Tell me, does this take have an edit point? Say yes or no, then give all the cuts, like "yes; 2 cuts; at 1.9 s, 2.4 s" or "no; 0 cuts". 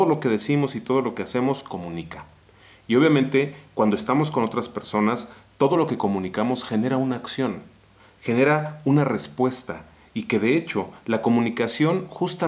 no; 0 cuts